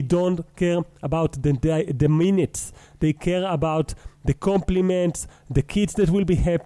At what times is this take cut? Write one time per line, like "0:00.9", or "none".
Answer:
none